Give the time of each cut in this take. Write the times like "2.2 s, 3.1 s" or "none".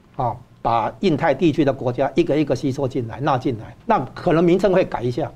3.8 s